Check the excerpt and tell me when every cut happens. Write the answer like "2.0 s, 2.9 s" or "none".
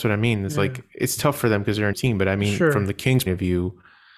1.9 s, 3.3 s